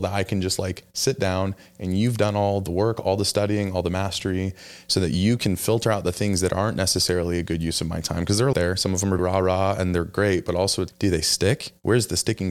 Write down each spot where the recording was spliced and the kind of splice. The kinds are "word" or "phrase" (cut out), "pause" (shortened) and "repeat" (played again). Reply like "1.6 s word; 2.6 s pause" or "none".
8.5 s phrase; 9.2 s word; 10.9 s word